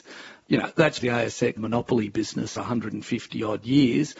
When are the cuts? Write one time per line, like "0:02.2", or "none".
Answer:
0:01.0
0:01.6
0:02.6